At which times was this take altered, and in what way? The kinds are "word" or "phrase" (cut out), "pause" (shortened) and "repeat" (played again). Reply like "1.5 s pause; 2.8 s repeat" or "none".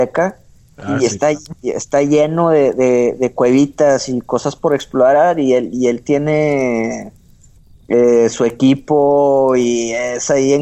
none